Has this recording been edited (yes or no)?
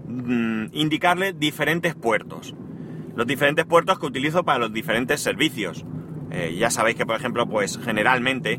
no